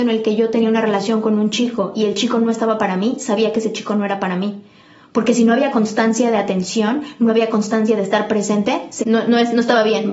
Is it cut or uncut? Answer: cut